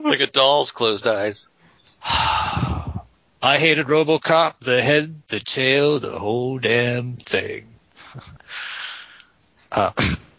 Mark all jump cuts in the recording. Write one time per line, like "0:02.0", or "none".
0:01.8
0:08.4